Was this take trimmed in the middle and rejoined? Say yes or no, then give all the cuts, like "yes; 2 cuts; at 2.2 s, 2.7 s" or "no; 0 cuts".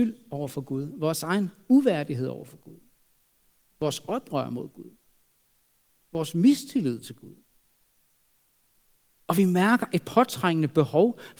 no; 0 cuts